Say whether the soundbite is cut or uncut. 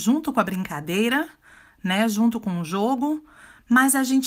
uncut